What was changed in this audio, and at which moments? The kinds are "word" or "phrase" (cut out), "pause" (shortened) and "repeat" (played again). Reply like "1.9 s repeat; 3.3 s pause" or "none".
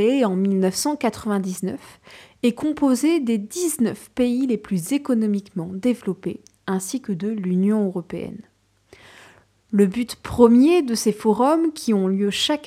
none